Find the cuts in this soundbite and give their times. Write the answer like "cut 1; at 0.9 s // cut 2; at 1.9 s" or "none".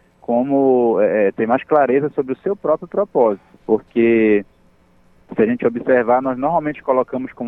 cut 1; at 3.5 s